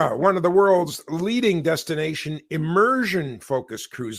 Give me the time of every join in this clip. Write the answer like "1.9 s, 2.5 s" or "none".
none